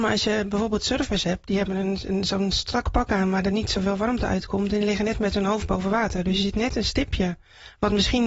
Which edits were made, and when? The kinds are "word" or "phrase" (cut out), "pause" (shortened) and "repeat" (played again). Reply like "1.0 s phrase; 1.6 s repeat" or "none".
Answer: none